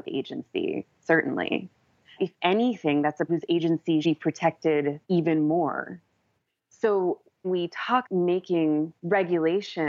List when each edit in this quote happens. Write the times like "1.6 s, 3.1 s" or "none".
2.2 s, 3.3 s, 4.0 s, 5.0 s, 7.4 s, 8.0 s, 9.0 s

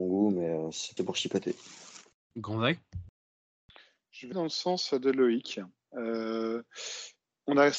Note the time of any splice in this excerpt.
1.0 s, 4.3 s

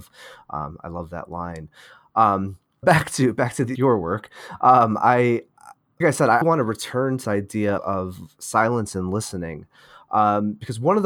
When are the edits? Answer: 2.8 s, 3.7 s, 6.0 s, 6.4 s, 7.2 s, 7.8 s

